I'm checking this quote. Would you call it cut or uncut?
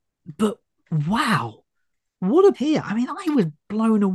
cut